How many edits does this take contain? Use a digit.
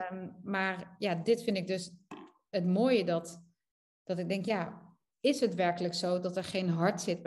0